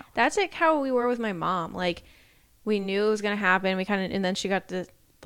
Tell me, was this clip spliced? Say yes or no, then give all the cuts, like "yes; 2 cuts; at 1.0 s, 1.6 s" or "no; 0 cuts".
no; 0 cuts